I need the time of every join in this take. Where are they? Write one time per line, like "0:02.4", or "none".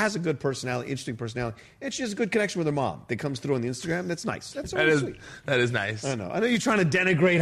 none